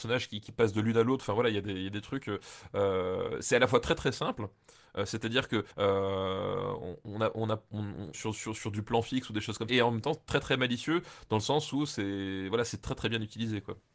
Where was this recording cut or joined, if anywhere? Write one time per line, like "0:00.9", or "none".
0:05.7
0:08.1
0:09.7